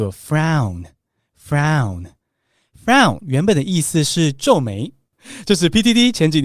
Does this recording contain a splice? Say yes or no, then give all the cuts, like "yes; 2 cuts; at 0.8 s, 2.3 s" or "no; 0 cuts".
no; 0 cuts